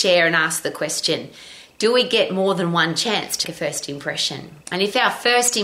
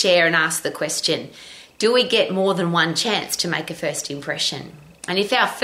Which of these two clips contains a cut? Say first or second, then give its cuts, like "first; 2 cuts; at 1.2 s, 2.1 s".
first; 2 cuts; at 3.4 s, 4.6 s